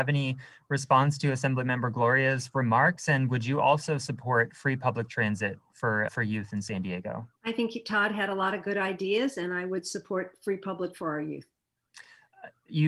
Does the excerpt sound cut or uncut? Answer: cut